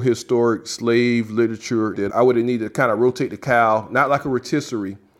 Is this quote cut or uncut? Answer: cut